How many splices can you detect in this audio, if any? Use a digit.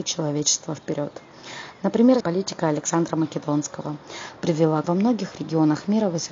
2